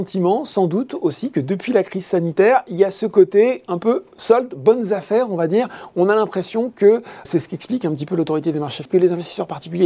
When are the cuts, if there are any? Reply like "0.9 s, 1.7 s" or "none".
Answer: 7.2 s, 8.8 s

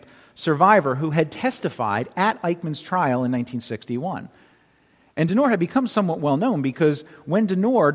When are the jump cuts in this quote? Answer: none

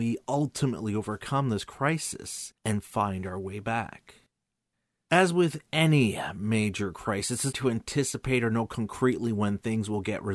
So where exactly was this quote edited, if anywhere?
2.6 s, 7.5 s

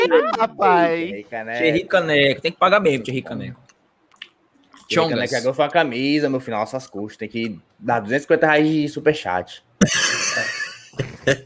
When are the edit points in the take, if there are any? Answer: none

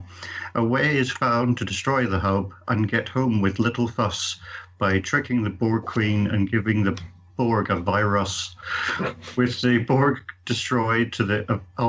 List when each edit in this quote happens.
none

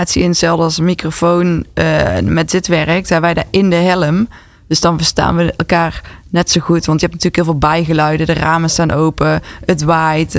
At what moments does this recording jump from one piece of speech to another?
none

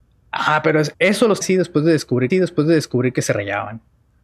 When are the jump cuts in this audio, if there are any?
0.9 s, 1.4 s, 2.3 s

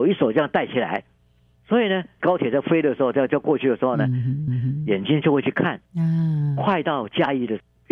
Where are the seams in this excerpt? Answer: 4.5 s, 5.9 s

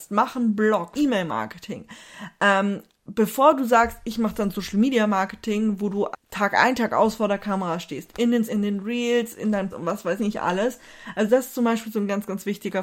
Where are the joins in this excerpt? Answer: 0.9 s, 6.1 s, 8.5 s, 9.7 s, 10.2 s

